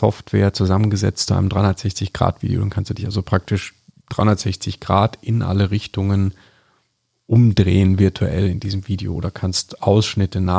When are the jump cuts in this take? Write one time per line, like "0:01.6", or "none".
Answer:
none